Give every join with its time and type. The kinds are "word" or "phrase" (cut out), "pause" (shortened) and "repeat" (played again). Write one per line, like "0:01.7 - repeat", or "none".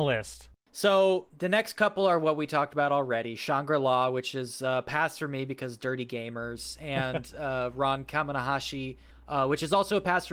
none